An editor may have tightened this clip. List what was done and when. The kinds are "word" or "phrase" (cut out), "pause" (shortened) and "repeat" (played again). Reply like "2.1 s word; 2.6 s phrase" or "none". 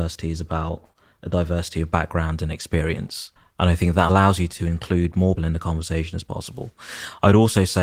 3.4 s pause; 5.4 s word